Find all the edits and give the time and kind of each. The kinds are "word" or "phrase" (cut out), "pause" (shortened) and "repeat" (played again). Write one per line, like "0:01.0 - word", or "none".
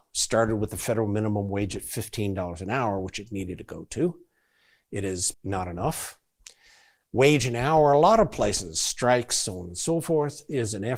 0:05.3 - word